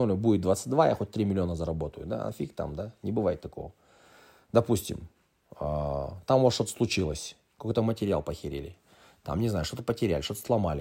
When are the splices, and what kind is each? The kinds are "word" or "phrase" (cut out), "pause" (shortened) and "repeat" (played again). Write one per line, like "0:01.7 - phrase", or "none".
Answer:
none